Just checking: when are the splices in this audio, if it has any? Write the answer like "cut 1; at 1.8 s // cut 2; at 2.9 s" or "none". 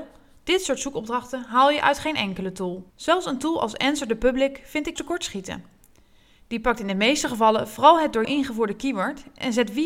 cut 1; at 2.9 s // cut 2; at 5.0 s // cut 3; at 8.2 s